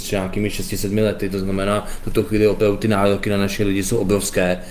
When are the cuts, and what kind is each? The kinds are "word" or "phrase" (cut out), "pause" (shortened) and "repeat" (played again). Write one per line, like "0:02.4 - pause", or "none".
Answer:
none